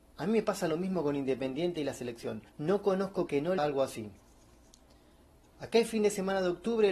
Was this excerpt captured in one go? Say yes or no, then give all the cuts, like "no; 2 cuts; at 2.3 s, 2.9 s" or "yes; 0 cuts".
no; 3 cuts; at 2.5 s, 3.3 s, 3.6 s